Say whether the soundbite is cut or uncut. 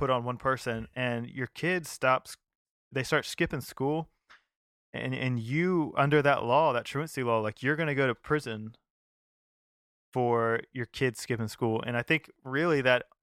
uncut